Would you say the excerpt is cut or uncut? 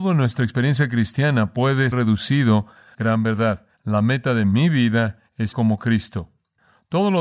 cut